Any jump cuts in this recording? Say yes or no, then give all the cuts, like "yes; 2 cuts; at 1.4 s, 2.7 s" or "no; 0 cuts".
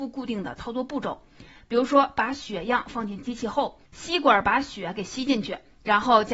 yes; 1 cut; at 3.8 s